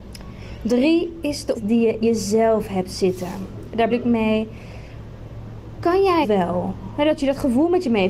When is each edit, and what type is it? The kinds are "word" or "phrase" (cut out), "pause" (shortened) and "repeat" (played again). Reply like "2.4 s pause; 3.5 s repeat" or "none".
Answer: 1.5 s word; 2.0 s word; 3.9 s word; 6.2 s word